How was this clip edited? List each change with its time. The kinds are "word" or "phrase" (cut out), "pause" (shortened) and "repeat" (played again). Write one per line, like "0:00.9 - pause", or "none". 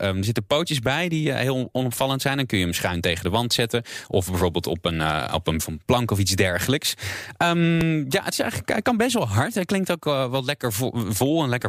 0:05.6 - word
0:08.3 - word